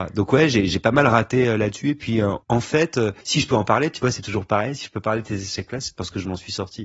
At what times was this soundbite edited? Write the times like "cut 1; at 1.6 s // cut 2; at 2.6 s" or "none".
cut 1; at 2.4 s // cut 2; at 3.2 s